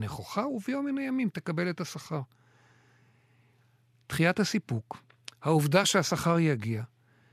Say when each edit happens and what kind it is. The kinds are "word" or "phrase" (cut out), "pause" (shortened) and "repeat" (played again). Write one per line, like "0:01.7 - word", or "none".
none

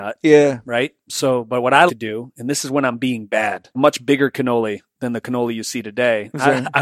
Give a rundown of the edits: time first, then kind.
0:01.9 - word
0:03.7 - phrase

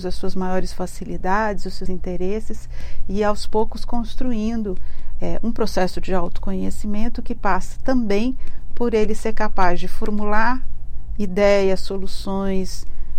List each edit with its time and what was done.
0:01.9 - word

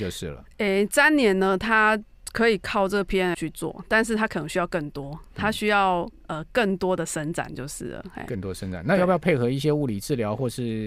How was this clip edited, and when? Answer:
0:03.3 - word

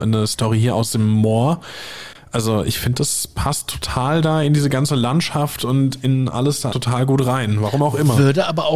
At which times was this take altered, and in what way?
0:06.7 - word

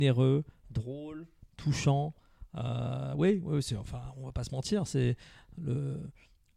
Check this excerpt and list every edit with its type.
none

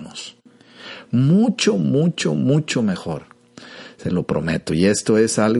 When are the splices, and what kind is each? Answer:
none

